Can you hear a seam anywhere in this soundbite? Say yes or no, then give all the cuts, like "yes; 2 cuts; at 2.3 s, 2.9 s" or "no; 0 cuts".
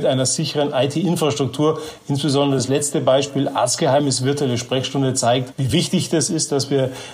no; 0 cuts